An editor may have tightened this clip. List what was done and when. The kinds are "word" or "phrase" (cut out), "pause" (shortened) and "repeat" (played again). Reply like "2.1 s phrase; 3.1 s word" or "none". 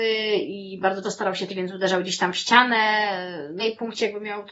1.0 s word; 1.5 s phrase; 3.6 s phrase